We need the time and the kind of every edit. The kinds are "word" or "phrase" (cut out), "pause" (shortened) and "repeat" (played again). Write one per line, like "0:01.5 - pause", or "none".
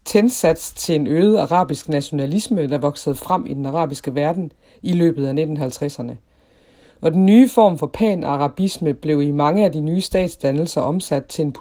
none